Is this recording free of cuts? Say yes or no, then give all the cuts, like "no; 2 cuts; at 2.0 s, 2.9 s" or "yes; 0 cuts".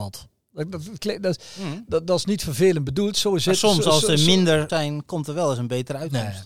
no; 1 cut; at 4.7 s